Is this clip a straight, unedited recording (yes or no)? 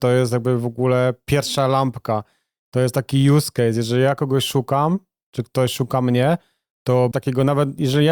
no